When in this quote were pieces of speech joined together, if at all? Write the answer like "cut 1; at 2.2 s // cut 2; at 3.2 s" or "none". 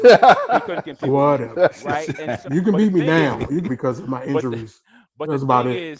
cut 1; at 2.5 s // cut 2; at 3.7 s